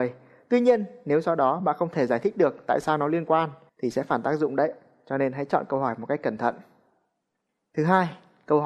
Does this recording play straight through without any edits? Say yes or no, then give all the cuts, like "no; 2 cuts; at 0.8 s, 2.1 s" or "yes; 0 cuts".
yes; 0 cuts